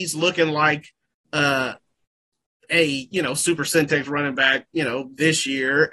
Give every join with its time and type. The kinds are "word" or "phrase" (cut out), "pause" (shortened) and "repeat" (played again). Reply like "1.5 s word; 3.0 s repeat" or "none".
none